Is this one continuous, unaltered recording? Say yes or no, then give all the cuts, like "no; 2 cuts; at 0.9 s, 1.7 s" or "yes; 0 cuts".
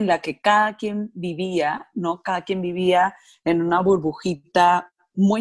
yes; 0 cuts